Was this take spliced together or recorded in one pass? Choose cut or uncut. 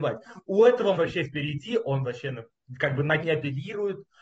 cut